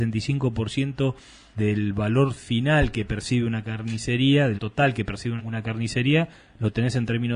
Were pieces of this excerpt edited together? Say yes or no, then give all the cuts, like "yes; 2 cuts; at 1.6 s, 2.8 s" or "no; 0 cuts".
yes; 3 cuts; at 1.5 s, 4.6 s, 5.4 s